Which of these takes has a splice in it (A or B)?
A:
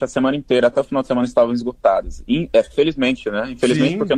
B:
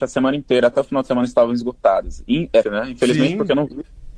B